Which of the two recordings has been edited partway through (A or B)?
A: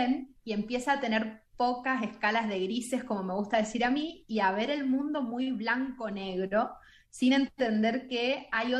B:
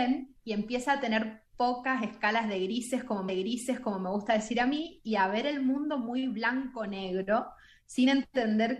B